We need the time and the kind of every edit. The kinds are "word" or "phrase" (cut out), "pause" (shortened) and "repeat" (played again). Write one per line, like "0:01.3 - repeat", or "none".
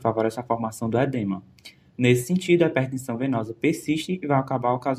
none